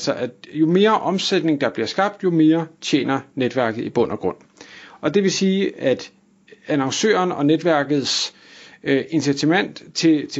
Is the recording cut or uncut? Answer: uncut